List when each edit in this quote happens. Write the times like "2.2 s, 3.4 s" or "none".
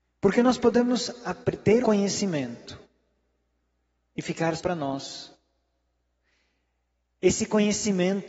1.8 s, 4.6 s